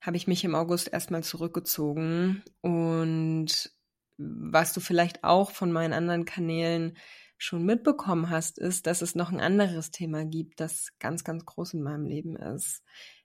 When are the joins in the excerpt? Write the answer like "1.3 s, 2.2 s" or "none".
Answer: none